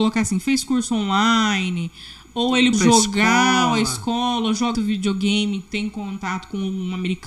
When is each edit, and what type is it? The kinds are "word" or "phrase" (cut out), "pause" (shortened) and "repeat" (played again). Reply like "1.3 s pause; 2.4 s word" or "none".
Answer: 2.7 s word; 4.7 s word